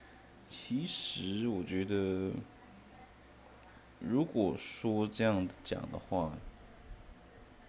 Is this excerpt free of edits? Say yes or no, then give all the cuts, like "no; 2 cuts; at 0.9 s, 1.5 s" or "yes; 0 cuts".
no; 1 cut; at 4.0 s